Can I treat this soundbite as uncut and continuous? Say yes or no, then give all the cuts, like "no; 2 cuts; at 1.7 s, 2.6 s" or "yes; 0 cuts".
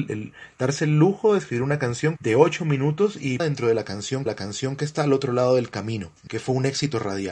no; 4 cuts; at 2.2 s, 3.4 s, 4.3 s, 6.3 s